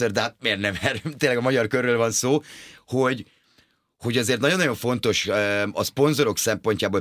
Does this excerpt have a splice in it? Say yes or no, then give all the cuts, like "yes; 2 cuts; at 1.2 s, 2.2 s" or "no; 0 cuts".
no; 0 cuts